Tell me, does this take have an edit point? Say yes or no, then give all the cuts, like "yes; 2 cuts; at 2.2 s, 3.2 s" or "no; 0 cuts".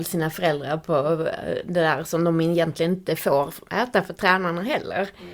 no; 0 cuts